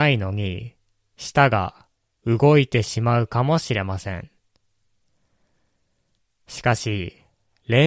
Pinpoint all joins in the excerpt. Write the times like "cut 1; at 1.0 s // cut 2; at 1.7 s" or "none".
none